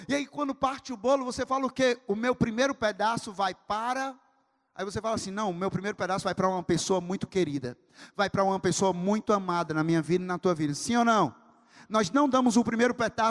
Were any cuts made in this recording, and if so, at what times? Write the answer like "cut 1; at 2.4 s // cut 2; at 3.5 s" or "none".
none